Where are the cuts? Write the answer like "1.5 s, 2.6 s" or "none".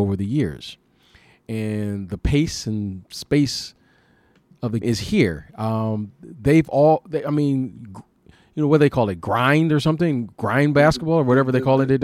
4.8 s